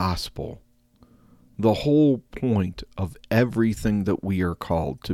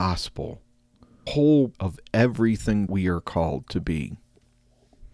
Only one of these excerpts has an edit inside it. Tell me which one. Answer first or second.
second